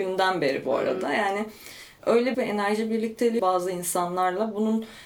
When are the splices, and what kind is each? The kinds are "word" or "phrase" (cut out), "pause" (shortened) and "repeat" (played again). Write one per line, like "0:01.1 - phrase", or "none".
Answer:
0:02.3 - phrase
0:03.4 - phrase